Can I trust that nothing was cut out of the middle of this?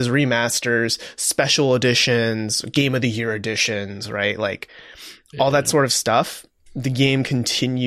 yes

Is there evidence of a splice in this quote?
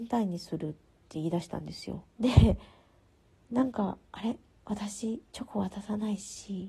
yes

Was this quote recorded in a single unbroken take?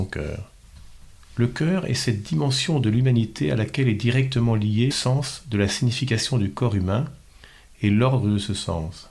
no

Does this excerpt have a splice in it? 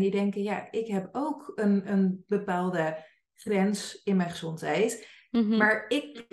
no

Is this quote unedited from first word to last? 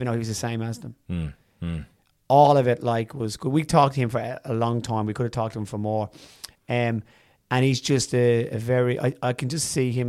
yes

